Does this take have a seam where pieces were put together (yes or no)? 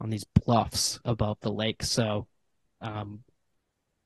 no